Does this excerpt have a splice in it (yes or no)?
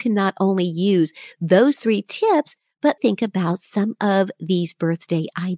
yes